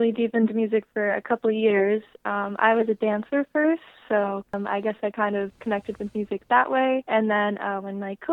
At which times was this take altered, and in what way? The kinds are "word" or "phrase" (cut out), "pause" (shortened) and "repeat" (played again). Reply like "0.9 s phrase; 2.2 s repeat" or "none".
none